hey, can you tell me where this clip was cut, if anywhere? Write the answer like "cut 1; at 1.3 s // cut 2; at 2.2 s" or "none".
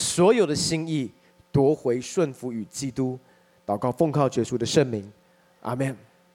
none